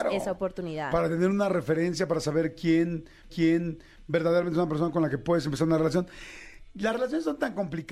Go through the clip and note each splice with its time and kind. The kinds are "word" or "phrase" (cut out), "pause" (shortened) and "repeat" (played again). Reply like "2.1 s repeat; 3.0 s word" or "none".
3.3 s repeat